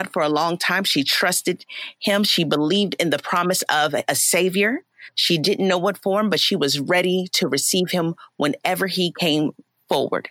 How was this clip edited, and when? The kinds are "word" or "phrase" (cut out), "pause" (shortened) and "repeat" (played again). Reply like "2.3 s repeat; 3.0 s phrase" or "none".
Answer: none